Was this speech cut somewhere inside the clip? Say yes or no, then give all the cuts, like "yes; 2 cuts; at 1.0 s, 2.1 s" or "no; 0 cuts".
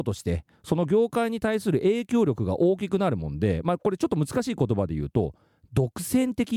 no; 0 cuts